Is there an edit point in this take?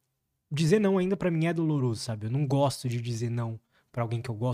no; 0 cuts

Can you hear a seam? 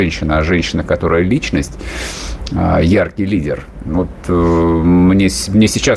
no; 0 cuts

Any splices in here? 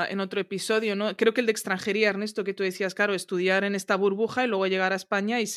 no; 0 cuts

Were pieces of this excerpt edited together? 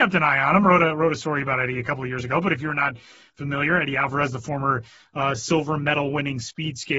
no; 0 cuts

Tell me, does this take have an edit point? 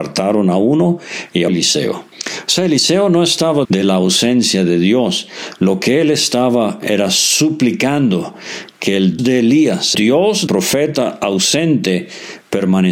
yes; 6 cuts; at 1.5 s, 2.1 s, 3.6 s, 9.2 s, 9.9 s, 10.5 s

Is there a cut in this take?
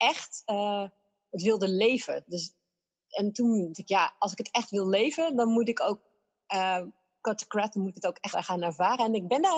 yes; 3 cuts; at 3.7 s, 7.2 s, 8.3 s

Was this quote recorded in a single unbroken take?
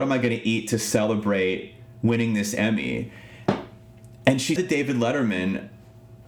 no; 1 cut; at 4.6 s

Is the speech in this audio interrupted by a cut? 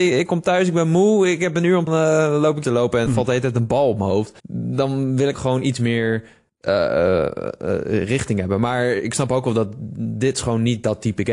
yes; 6 cuts; at 1.9 s, 2.6 s, 3.1 s, 4.4 s, 5.3 s, 6.5 s

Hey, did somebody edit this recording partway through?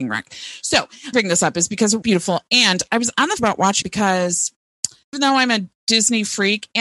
yes; 5 cuts; at 1.1 s, 2.0 s, 3.4 s, 3.8 s, 5.1 s

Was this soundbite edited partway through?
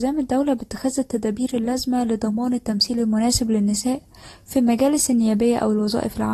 no; 0 cuts

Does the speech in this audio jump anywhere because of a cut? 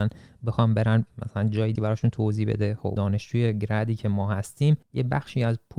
yes; 3 cuts; at 1.8 s, 3.0 s, 4.8 s

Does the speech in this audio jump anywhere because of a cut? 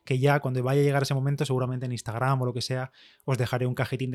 no; 0 cuts

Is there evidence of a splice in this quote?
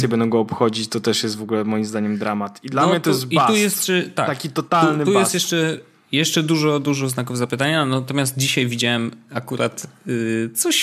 no; 0 cuts

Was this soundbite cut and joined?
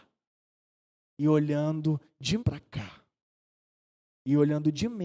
yes; 1 cut; at 2.4 s

